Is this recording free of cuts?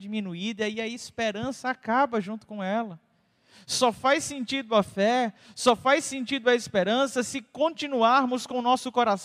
yes; 0 cuts

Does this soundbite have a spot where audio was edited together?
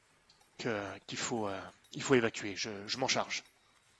yes; 1 cut; at 1.8 s

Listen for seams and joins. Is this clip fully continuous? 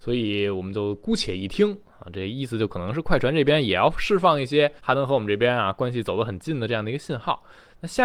no; 1 cut; at 4.8 s

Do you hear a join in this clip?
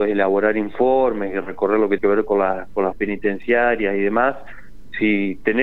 yes; 2 cuts; at 2.0 s, 2.9 s

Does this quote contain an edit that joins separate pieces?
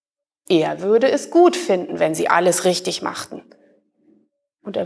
no; 0 cuts

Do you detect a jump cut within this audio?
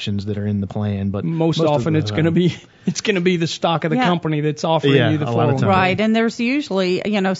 no; 0 cuts

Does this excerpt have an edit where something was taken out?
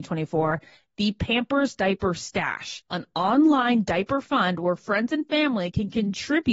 yes; 1 cut; at 2.9 s

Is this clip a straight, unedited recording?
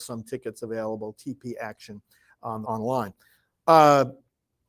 no; 1 cut; at 2.6 s

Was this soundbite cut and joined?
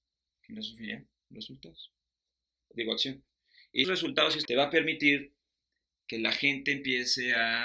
yes; 3 cuts; at 1.1 s, 3.8 s, 4.5 s

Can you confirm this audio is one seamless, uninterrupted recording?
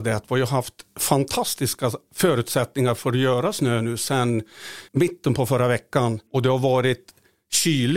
no; 2 cuts; at 4.9 s, 6.3 s

